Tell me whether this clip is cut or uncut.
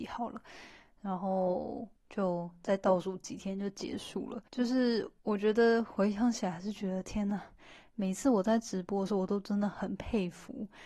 cut